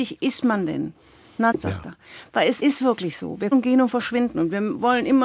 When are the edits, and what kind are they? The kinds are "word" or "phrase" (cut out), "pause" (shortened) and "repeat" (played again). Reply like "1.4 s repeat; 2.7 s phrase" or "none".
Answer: 1.5 s word; 2.6 s word; 3.5 s word